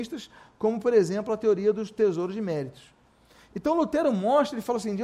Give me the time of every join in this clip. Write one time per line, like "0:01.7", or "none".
none